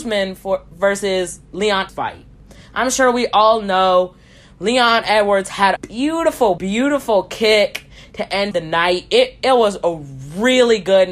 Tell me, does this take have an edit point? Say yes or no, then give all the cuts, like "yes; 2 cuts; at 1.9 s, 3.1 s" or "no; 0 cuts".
yes; 4 cuts; at 1.9 s, 5.8 s, 6.6 s, 8.5 s